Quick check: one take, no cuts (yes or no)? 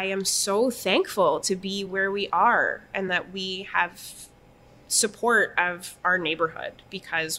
yes